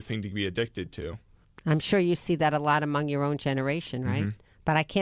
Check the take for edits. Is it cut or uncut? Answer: cut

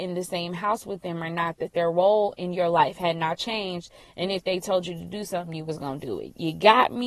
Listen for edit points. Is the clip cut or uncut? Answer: uncut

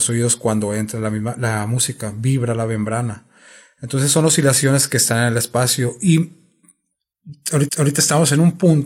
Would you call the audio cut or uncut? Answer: cut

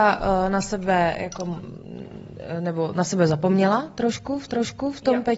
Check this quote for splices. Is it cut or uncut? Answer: cut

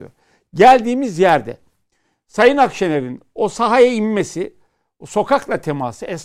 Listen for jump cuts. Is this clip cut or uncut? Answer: uncut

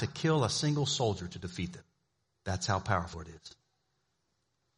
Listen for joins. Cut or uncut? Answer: cut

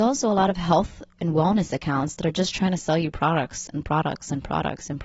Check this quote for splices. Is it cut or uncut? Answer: uncut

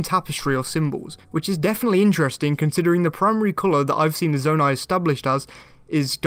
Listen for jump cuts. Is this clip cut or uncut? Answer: cut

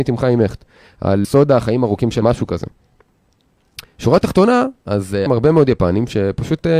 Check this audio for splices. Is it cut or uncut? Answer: cut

